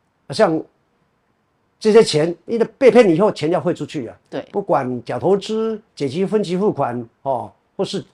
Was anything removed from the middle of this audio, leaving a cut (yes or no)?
yes